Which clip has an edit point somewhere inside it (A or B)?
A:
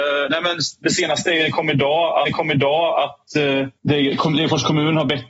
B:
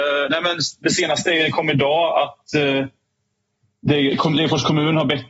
A